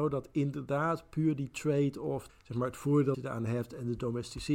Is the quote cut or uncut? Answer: cut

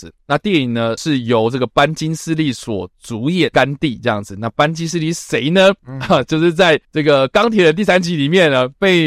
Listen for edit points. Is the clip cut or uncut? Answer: cut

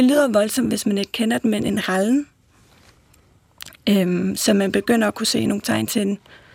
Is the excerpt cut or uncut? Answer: uncut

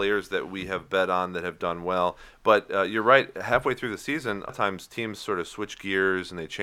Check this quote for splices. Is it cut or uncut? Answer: cut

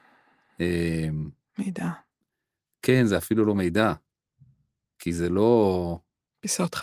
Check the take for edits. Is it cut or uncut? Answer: uncut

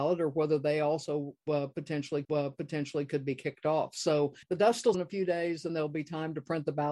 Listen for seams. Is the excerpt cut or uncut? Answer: cut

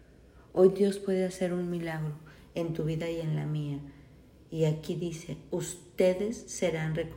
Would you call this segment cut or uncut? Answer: uncut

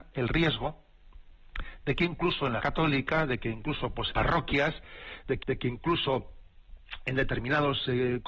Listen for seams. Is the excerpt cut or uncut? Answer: cut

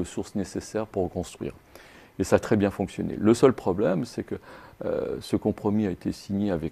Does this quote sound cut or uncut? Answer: uncut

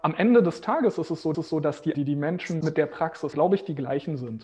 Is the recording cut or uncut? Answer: cut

